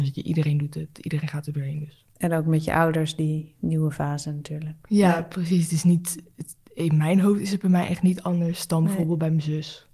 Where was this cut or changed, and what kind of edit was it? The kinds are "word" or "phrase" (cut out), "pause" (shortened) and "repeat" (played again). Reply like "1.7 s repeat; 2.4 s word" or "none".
2.1 s pause